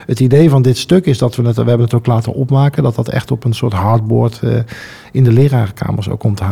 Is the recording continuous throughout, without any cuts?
yes; 0 cuts

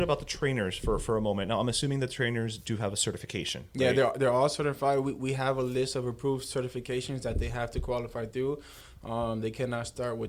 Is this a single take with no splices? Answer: yes; 0 cuts

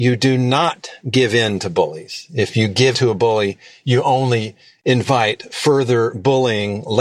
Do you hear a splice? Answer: yes; 1 cut; at 2.9 s

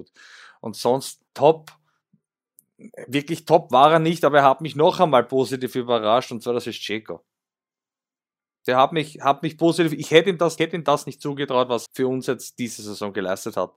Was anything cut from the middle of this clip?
yes; 3 cuts; at 1.3 s, 10.6 s, 11.9 s

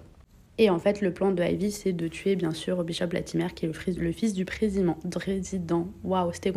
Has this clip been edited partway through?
yes; 1 cut; at 4.0 s

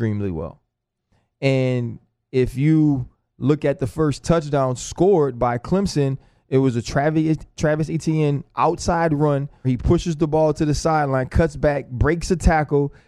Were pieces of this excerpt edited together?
yes; 2 cuts; at 7.6 s, 9.6 s

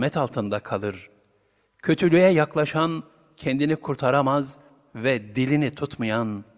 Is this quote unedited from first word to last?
yes; 0 cuts

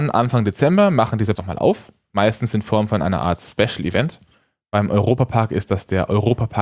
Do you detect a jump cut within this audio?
yes; 1 cut; at 1.4 s

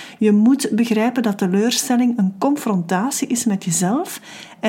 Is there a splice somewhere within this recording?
no; 0 cuts

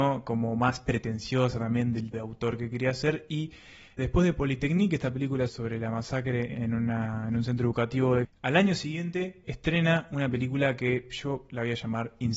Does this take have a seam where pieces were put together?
yes; 6 cuts; at 2.1 s, 4.0 s, 5.5 s, 6.5 s, 8.2 s, 9.4 s

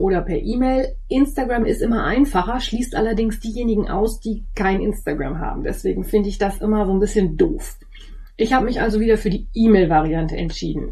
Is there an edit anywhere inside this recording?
no; 0 cuts

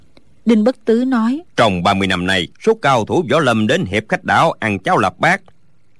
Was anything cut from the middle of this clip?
yes; 2 cuts; at 1.5 s, 2.5 s

